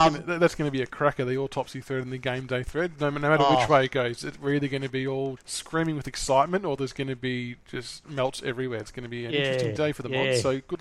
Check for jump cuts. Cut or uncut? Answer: cut